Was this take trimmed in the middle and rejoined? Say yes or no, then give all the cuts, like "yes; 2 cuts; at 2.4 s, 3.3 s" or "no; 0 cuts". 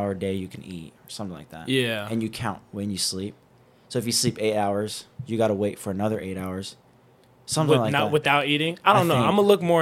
no; 0 cuts